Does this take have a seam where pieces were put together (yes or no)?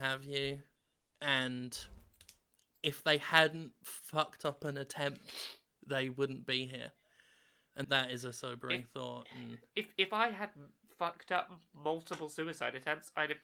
yes